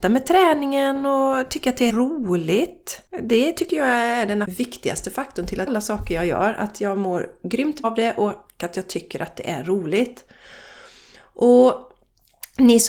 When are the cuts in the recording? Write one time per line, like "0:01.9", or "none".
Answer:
0:01.9
0:04.4
0:05.7
0:07.8